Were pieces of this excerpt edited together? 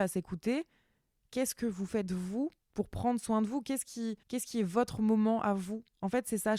yes; 1 cut; at 4.2 s

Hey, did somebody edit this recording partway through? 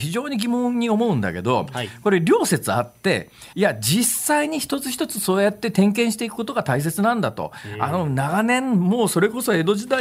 yes; 1 cut; at 3.5 s

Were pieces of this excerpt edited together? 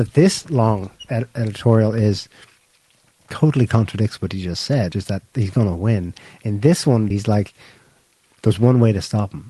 yes; 2 cuts; at 4.9 s, 7.1 s

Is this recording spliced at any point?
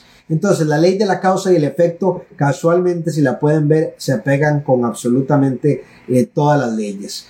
no; 0 cuts

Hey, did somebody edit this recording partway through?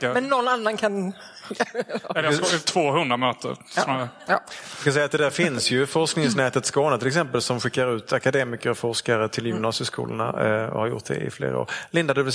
no; 0 cuts

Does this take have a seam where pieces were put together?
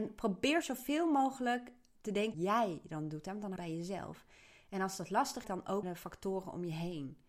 yes; 4 cuts; at 2.3 s, 3.6 s, 5.4 s, 5.8 s

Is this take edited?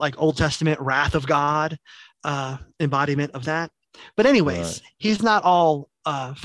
no; 0 cuts

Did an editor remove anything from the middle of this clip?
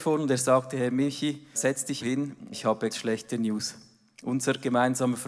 yes; 4 cuts; at 1.5 s, 2.0 s, 2.5 s, 2.9 s

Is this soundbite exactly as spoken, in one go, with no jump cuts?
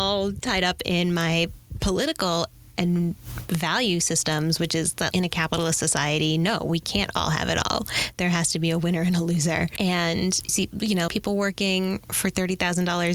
no; 3 cuts; at 5.1 s, 10.5 s, 11.1 s

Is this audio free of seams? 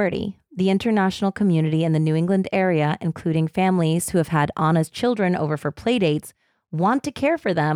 yes; 0 cuts

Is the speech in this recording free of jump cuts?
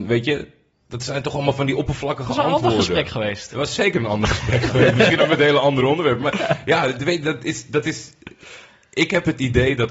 yes; 0 cuts

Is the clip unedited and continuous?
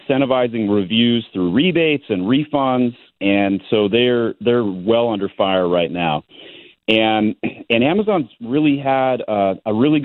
yes; 0 cuts

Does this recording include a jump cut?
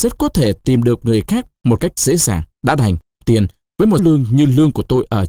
yes; 5 cuts; at 1.0 s, 2.0 s, 2.5 s, 3.2 s, 4.0 s

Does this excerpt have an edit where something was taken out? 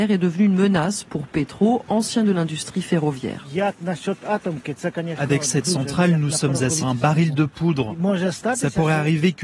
yes; 2 cuts; at 2.3 s, 6.8 s

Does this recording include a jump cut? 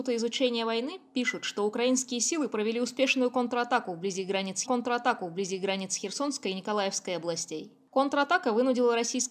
yes; 1 cut; at 4.6 s

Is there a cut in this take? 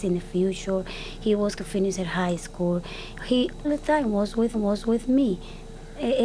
yes; 3 cuts; at 1.6 s, 3.6 s, 4.5 s

